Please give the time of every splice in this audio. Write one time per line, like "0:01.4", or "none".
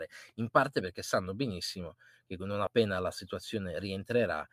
none